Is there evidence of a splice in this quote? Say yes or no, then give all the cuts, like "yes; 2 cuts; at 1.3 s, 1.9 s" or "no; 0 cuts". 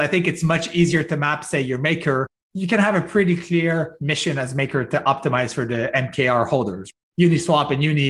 no; 0 cuts